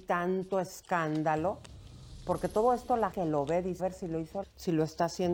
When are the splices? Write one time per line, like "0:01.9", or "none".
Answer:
0:03.1
0:03.8
0:04.4